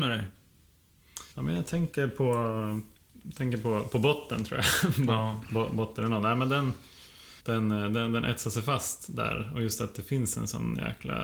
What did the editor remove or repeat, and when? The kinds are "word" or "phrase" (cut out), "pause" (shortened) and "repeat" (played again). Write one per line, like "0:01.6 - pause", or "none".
0:01.3 - pause
0:07.4 - pause

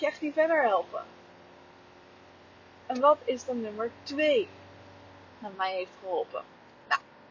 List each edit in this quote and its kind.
none

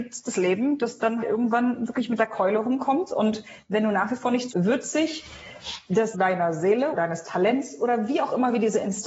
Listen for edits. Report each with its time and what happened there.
0:01.2 - word
0:04.5 - word
0:06.1 - word
0:06.9 - word

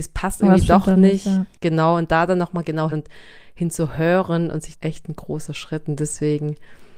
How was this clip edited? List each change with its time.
0:02.9 - word
0:04.7 - phrase

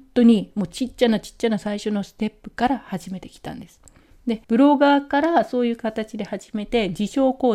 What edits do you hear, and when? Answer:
0:04.4 - pause

